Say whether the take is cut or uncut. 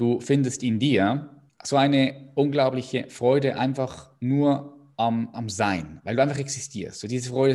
cut